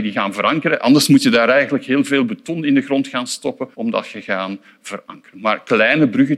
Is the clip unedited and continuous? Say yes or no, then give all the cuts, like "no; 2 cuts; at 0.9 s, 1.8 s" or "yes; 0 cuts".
no; 1 cut; at 3.7 s